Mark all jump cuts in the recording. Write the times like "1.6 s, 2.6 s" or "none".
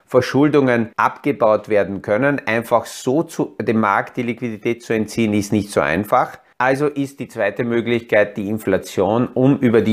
0.9 s, 6.5 s